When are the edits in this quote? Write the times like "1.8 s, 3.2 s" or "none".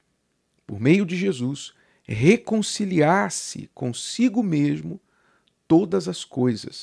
none